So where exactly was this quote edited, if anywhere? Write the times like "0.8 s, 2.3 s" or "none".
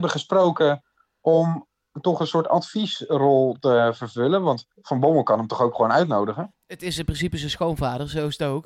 4.7 s